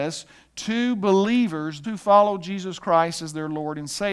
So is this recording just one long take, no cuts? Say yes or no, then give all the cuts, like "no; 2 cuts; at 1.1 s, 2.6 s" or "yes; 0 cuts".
no; 1 cut; at 1.8 s